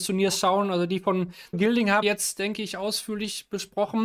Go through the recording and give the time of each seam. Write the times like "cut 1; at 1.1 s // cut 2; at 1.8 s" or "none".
cut 1; at 1.5 s // cut 2; at 2.0 s